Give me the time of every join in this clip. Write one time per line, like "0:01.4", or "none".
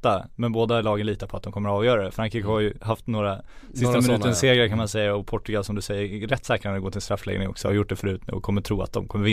none